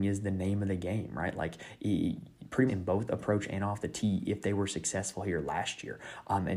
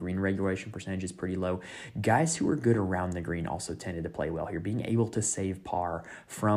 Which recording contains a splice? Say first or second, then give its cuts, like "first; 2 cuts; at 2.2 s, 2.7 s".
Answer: first; 1 cut; at 2.7 s